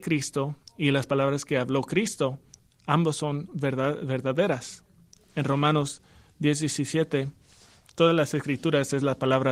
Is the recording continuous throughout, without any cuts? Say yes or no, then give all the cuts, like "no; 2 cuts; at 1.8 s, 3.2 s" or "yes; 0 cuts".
yes; 0 cuts